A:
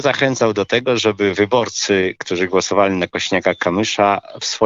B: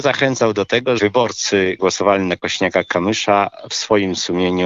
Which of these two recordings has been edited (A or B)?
B